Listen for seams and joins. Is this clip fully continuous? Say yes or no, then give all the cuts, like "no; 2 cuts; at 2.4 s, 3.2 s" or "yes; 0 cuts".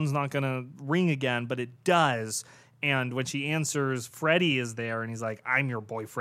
yes; 0 cuts